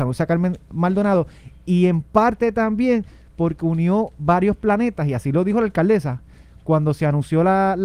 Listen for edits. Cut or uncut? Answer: uncut